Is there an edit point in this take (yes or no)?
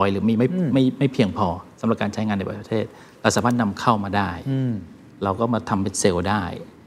no